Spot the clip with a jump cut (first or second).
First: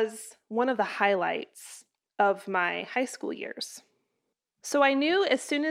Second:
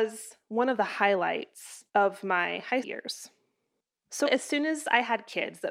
second